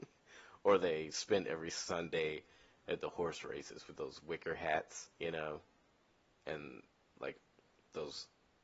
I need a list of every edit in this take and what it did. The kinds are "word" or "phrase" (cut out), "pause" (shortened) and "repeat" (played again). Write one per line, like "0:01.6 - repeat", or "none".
0:05.1 - pause